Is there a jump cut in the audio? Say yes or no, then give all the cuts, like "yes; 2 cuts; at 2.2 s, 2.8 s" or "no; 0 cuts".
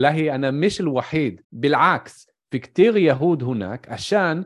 yes; 1 cut; at 1.4 s